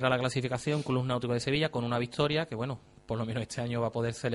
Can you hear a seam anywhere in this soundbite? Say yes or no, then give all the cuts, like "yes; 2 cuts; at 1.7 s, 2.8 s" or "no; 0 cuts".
no; 0 cuts